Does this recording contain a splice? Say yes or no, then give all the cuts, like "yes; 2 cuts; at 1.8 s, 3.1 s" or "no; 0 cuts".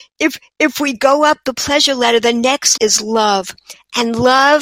yes; 1 cut; at 2.8 s